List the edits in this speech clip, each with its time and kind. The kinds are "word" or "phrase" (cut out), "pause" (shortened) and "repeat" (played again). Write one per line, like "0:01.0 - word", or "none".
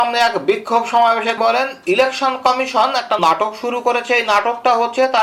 0:01.4 - word
0:03.2 - word